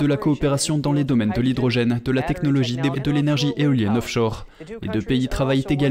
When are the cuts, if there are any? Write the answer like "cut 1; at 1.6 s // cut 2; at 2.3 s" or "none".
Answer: cut 1; at 2.9 s